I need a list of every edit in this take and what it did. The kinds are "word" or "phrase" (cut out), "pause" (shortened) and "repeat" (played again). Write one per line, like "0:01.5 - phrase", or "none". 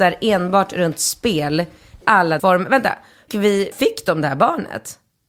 0:02.0 - word
0:02.4 - word
0:03.3 - word
0:03.7 - word